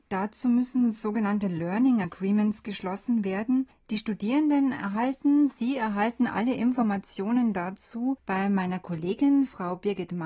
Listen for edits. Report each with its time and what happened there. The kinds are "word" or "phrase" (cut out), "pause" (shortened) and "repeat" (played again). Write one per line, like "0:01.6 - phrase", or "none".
none

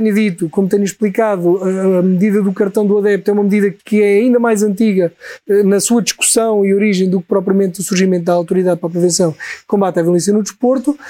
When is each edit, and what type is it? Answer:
0:03.8 - pause

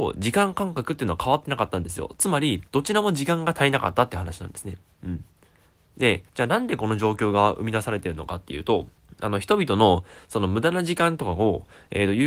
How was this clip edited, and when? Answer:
0:02.7 - pause
0:06.3 - pause
0:09.0 - pause

